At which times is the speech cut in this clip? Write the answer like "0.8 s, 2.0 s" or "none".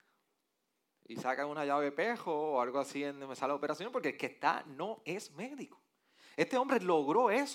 none